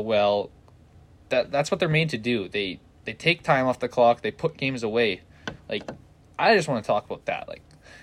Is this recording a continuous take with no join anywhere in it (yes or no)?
yes